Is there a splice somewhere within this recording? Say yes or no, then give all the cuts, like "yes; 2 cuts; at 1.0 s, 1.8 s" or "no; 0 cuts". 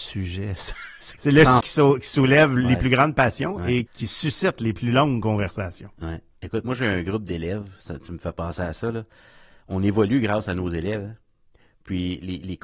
yes; 4 cuts; at 1.2 s, 1.6 s, 3.9 s, 6.3 s